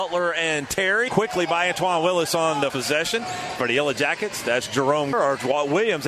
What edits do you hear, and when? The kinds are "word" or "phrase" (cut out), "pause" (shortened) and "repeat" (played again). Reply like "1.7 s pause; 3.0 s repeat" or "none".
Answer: 1.1 s phrase; 2.7 s word; 5.1 s phrase